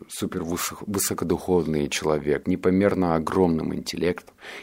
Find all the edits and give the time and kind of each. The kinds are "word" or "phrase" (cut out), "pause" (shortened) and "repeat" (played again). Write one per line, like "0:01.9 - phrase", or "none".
0:02.4 - word